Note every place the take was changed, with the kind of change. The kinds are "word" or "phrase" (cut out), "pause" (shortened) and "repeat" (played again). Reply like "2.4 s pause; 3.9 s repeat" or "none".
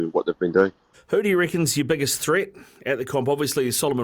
0.9 s pause